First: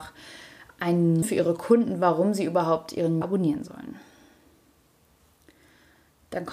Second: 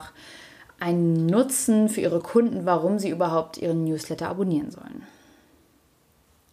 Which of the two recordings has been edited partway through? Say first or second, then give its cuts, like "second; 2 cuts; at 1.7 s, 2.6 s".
first; 2 cuts; at 1.2 s, 3.2 s